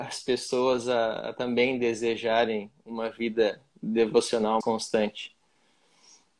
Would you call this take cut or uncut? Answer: cut